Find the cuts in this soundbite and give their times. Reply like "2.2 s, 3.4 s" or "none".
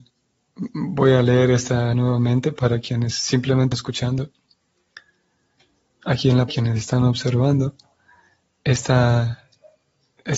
1.9 s, 3.7 s, 6.5 s